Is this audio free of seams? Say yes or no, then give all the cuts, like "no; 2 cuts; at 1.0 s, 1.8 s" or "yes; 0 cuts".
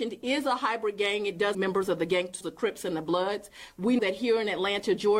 no; 3 cuts; at 1.5 s, 2.4 s, 4.0 s